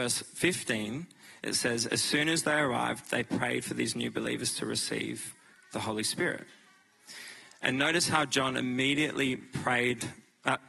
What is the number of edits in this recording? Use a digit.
0